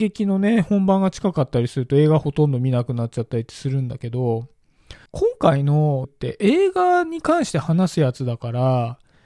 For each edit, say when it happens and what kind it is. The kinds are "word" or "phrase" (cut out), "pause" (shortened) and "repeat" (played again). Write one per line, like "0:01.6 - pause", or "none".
0:05.1 - pause
0:06.0 - word